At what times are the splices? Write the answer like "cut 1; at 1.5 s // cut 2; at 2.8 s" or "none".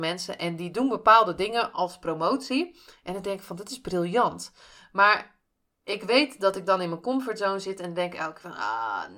cut 1; at 5.6 s